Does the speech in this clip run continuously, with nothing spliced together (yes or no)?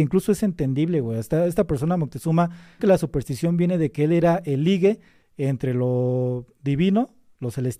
no